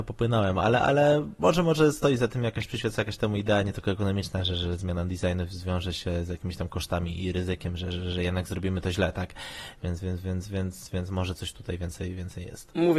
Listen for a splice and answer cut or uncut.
uncut